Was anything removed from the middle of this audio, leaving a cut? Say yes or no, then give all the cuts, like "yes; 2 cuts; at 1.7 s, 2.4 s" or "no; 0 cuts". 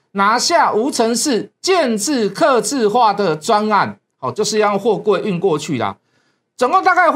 no; 0 cuts